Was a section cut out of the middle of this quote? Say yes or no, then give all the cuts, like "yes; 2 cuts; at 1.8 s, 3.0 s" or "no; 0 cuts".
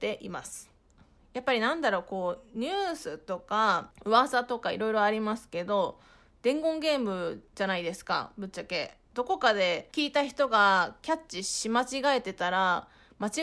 no; 0 cuts